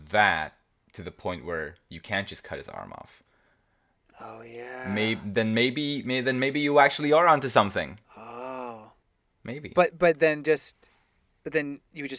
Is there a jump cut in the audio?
no; 0 cuts

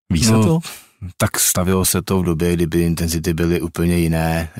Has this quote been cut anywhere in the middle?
no; 0 cuts

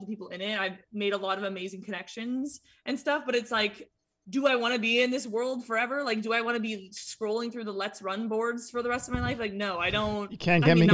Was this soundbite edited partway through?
no; 0 cuts

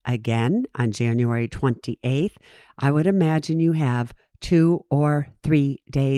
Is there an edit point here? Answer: no; 0 cuts

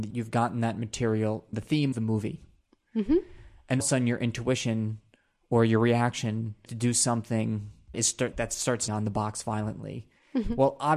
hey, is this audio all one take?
no; 7 cuts; at 1.5 s, 1.9 s, 3.8 s, 6.7 s, 7.9 s, 8.3 s, 8.9 s

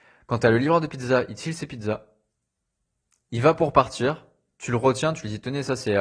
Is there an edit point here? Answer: no; 0 cuts

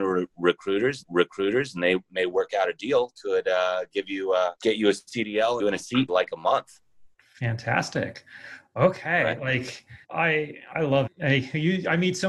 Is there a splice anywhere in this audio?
yes; 8 cuts; at 1.0 s, 3.2 s, 4.6 s, 5.6 s, 6.1 s, 7.1 s, 10.0 s, 11.1 s

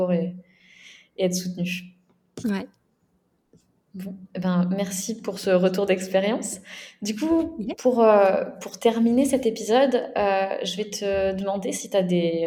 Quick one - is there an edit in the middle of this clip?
no; 0 cuts

